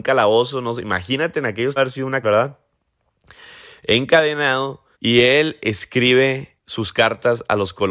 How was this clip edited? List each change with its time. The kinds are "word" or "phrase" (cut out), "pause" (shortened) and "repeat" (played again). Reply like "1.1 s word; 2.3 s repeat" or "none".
1.8 s phrase; 2.2 s word; 4.9 s pause; 6.6 s pause